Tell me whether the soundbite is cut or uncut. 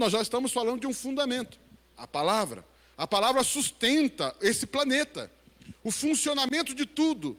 uncut